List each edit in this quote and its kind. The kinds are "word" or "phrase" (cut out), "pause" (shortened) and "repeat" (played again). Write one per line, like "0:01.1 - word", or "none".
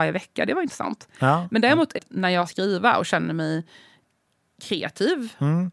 0:01.9 - phrase
0:02.4 - phrase